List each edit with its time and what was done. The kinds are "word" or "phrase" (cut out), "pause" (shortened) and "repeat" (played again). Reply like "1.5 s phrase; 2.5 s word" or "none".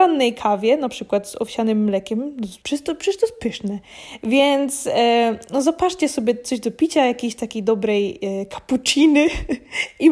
2.6 s pause